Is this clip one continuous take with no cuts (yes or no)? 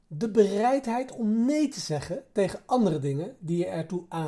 yes